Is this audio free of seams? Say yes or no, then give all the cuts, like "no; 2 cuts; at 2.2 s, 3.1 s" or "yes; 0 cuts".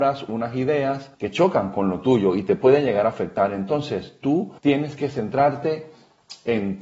no; 2 cuts; at 1.1 s, 4.6 s